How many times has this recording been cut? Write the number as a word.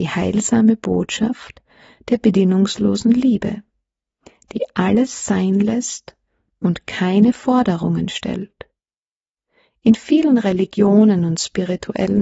zero